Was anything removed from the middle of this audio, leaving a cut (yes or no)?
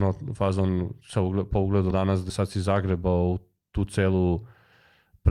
yes